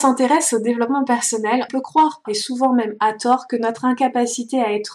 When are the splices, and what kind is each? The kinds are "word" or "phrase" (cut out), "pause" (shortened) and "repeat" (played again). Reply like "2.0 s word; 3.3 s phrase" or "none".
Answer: 1.7 s word; 2.2 s word